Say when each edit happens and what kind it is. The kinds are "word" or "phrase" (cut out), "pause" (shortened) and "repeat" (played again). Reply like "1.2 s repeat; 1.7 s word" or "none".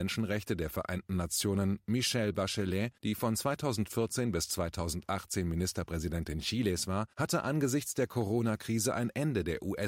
3.0 s pause; 7.1 s pause